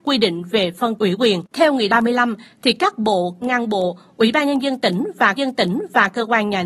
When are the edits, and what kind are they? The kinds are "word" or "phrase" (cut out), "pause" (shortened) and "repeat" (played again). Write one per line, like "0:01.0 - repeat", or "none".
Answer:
0:01.0 - word
0:01.5 - pause
0:01.9 - word
0:03.4 - phrase
0:05.4 - repeat